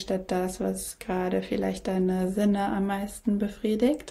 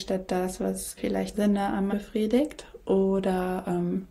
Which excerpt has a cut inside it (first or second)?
second